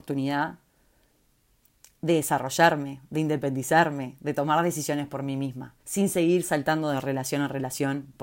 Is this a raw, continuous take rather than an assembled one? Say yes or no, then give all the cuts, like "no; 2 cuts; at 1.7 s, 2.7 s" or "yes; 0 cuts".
no; 1 cut; at 5.8 s